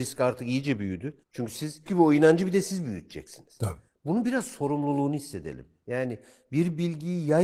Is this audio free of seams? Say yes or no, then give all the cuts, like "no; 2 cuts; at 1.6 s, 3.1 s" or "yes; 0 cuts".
no; 2 cuts; at 1.2 s, 1.9 s